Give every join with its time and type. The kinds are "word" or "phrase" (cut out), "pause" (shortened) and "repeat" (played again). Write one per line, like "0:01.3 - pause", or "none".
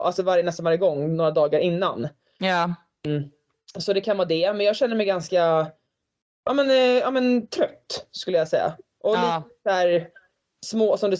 none